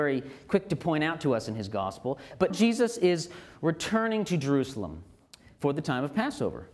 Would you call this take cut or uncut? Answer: cut